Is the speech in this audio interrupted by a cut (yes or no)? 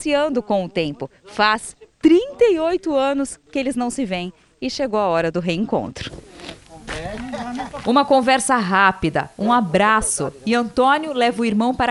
no